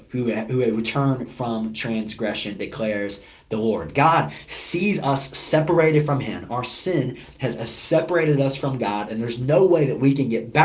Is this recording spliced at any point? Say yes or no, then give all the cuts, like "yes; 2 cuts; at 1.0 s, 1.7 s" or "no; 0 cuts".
no; 0 cuts